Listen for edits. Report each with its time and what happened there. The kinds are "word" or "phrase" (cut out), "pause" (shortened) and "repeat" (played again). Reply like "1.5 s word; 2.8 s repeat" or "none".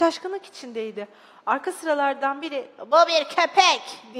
none